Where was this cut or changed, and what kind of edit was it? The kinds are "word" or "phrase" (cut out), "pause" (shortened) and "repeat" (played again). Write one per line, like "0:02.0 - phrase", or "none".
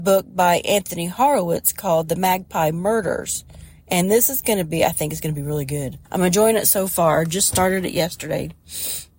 0:06.0 - pause